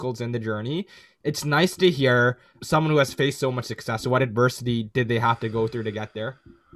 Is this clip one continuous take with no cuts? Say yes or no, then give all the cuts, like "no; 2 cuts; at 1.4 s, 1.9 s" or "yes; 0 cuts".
yes; 0 cuts